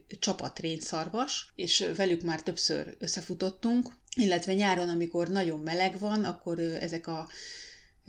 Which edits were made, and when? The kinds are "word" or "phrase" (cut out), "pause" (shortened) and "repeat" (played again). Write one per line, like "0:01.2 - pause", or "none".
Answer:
none